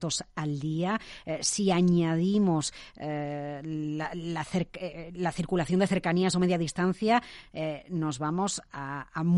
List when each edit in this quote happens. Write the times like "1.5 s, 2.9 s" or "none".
none